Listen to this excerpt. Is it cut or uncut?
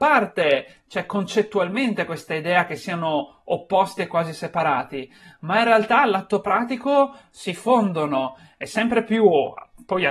uncut